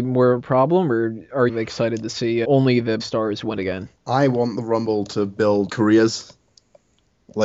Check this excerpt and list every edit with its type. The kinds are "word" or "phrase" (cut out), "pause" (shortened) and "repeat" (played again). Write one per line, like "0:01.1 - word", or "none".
0:01.5 - phrase
0:02.4 - word
0:03.0 - word
0:03.6 - word
0:04.0 - pause
0:05.7 - word